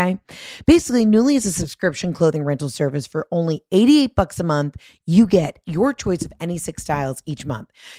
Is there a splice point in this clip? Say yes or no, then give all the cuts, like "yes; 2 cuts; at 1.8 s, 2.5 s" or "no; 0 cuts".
no; 0 cuts